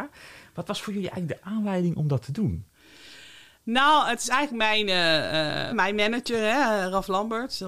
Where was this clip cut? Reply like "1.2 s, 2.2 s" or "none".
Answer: 5.7 s